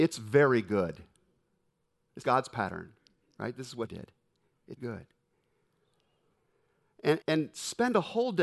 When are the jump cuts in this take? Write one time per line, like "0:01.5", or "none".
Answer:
0:02.2
0:03.9
0:04.8
0:07.2